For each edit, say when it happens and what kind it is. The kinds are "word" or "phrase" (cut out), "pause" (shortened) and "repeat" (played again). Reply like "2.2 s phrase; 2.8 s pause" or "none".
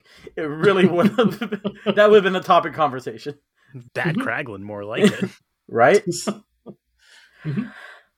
3.9 s pause